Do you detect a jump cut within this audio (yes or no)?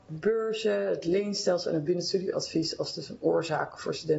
no